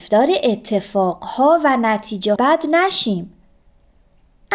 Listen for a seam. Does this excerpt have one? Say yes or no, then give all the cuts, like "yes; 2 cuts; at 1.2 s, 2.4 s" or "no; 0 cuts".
yes; 1 cut; at 2.4 s